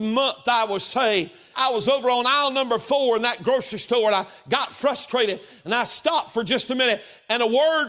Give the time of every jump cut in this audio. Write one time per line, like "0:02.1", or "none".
none